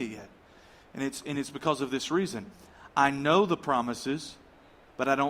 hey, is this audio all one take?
yes; 0 cuts

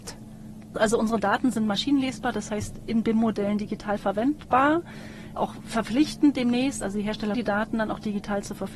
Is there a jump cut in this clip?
yes; 2 cuts; at 5.4 s, 7.3 s

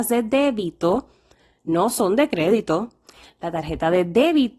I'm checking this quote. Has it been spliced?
no; 0 cuts

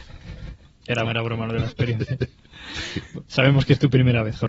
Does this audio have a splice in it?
yes; 1 cut; at 1.0 s

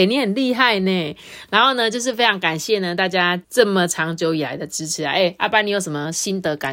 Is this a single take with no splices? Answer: no; 1 cut; at 3.4 s

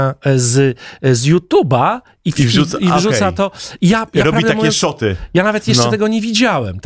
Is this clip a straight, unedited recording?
yes; 0 cuts

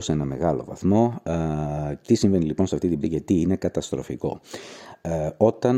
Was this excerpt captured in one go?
no; 2 cuts; at 2.1 s, 3.0 s

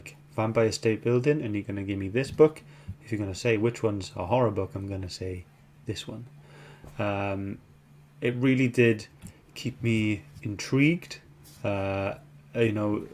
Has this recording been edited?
no; 0 cuts

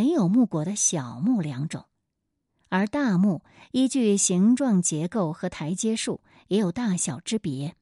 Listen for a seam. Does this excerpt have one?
no; 0 cuts

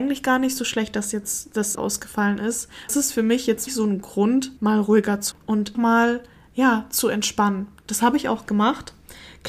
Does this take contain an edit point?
yes; 6 cuts; at 1.8 s, 2.9 s, 3.7 s, 4.6 s, 5.3 s, 5.7 s

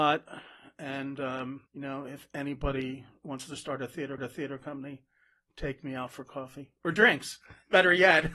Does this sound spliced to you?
yes; 2 cuts; at 1.7 s, 4.2 s

